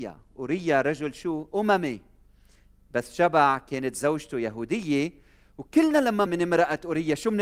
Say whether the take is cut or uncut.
cut